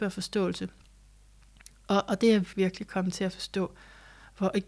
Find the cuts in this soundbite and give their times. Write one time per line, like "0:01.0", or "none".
0:02.5